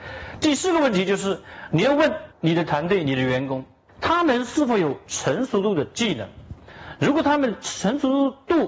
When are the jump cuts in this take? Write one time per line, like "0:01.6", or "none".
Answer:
0:02.3
0:03.9